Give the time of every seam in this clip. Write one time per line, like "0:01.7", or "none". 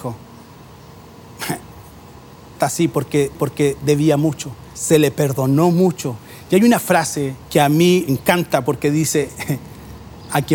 0:02.5
0:03.3
0:04.7
0:07.4
0:08.1

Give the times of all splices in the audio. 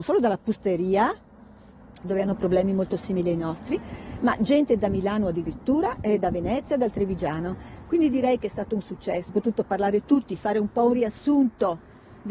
0:09.3

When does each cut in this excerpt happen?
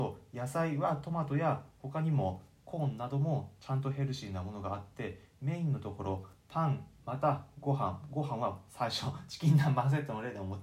none

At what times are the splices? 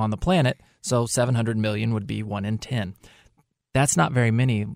none

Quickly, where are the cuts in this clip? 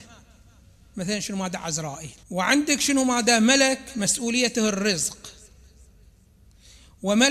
0:02.2

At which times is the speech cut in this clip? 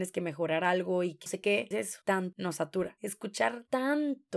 0:01.3
0:01.7
0:02.3

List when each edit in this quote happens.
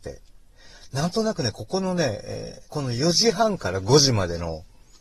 0:02.7

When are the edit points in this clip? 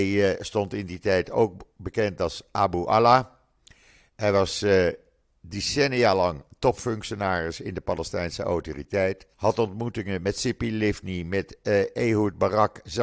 0:09.3

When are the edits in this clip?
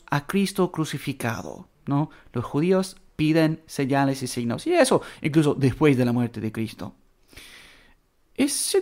0:01.8

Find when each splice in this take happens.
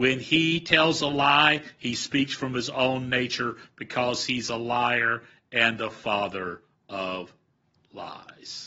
none

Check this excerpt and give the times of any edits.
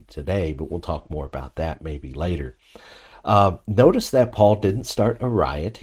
none

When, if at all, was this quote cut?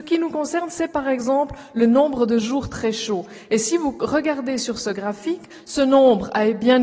none

